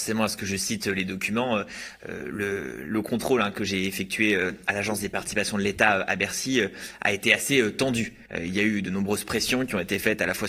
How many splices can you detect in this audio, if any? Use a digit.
1